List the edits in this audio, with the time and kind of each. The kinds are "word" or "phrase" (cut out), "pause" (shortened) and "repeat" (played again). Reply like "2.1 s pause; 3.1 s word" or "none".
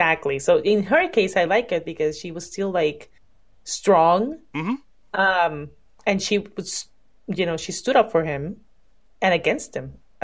none

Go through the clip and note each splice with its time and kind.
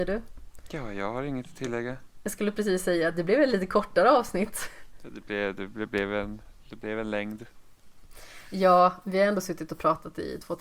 none

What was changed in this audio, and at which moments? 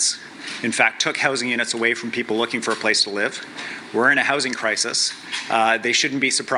none

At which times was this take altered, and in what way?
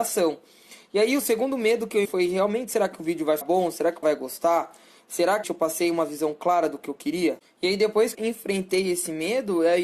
2.0 s word; 3.4 s word; 4.0 s word; 5.4 s word; 8.1 s word

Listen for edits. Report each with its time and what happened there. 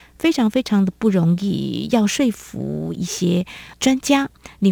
3.7 s pause

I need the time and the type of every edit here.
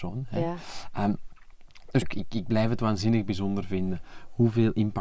2.0 s word

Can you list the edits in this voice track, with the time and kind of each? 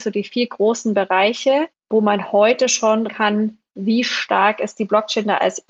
1.7 s pause; 3.1 s phrase

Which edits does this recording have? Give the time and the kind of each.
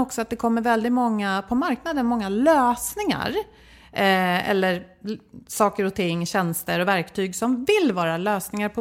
none

